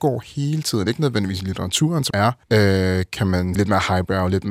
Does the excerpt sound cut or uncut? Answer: cut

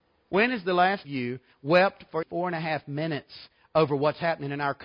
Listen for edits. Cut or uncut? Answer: cut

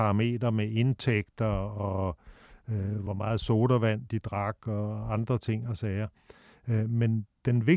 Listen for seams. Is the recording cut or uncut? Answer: uncut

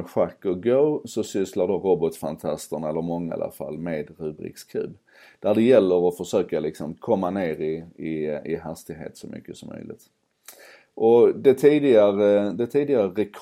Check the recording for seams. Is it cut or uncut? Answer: cut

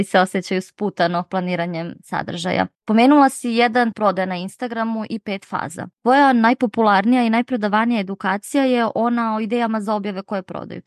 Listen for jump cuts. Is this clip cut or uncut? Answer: cut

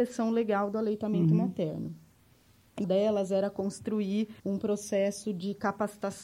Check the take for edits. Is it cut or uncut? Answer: cut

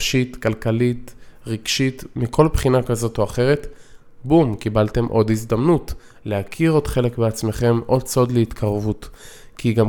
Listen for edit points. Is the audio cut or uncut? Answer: uncut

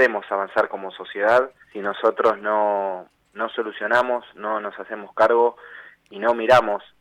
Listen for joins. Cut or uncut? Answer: cut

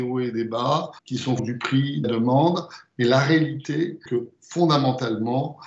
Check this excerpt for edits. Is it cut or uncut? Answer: cut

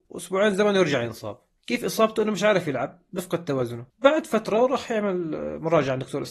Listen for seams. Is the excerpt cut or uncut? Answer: cut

